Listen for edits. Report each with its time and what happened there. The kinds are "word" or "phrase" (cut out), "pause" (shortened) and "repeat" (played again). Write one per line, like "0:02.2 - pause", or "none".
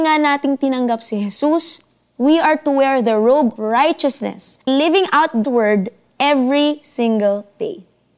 0:03.6 - word
0:04.7 - word
0:05.4 - word